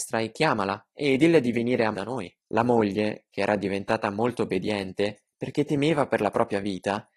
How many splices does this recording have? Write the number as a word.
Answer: two